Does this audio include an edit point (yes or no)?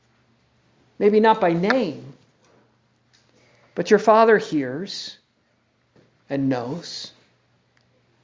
no